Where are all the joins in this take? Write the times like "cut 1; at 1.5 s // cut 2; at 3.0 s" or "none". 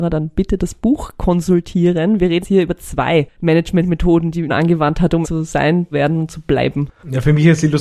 cut 1; at 2.4 s // cut 2; at 4.5 s // cut 3; at 5.2 s // cut 4; at 5.9 s